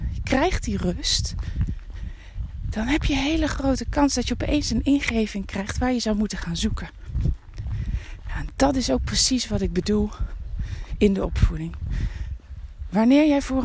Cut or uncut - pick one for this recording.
uncut